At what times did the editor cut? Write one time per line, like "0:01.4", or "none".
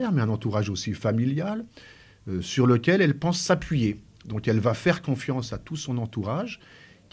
none